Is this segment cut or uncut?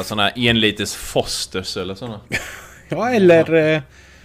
cut